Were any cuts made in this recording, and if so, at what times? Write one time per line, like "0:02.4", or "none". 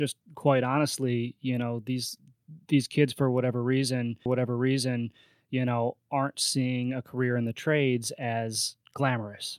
0:04.3